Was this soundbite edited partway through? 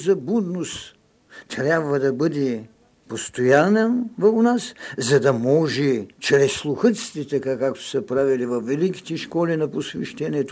yes; 2 cuts; at 2.8 s, 6.1 s

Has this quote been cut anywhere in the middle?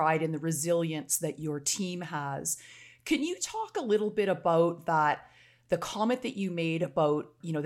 no; 0 cuts

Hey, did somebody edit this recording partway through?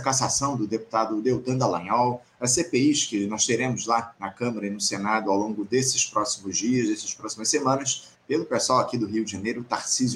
yes; 1 cut; at 8.1 s

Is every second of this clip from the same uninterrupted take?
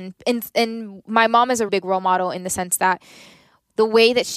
no; 1 cut; at 1.7 s

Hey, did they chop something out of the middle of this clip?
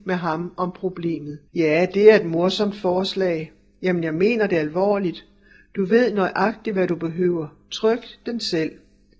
yes; 1 cut; at 1.5 s

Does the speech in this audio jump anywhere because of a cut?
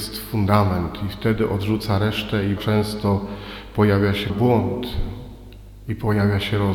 yes; 2 cuts; at 2.6 s, 4.3 s

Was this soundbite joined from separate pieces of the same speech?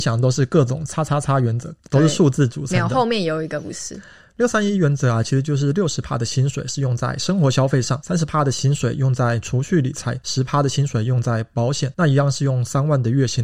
no; 0 cuts

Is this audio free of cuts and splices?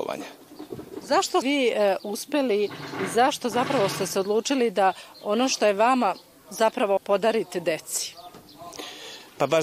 no; 2 cuts; at 1.4 s, 7.0 s

